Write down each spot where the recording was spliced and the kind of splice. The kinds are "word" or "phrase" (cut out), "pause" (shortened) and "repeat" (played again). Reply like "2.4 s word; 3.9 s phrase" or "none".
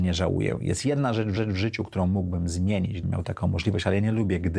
1.4 s repeat; 3.0 s word